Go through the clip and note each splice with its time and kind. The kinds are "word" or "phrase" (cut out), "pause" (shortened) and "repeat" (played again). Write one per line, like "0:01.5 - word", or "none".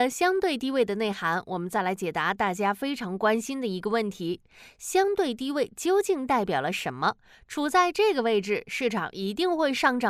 none